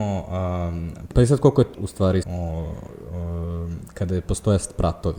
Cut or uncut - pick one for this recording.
cut